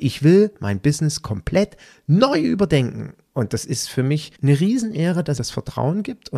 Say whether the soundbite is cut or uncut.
cut